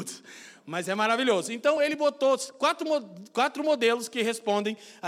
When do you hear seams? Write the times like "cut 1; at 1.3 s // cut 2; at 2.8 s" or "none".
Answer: none